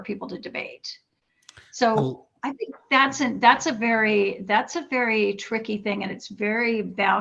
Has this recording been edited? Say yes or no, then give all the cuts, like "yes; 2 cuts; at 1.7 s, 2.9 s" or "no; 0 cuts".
no; 0 cuts